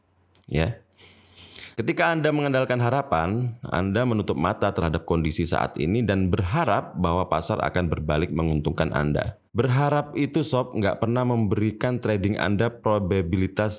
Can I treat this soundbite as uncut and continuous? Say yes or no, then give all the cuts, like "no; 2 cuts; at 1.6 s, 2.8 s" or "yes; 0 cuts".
no; 2 cuts; at 1.7 s, 9.5 s